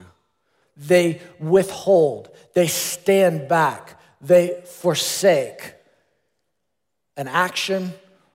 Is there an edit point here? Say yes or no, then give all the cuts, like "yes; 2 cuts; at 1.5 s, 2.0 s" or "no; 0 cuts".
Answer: no; 0 cuts